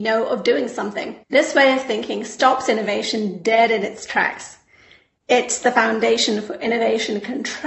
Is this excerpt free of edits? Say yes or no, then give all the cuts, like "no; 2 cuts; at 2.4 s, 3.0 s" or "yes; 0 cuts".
no; 1 cut; at 1.2 s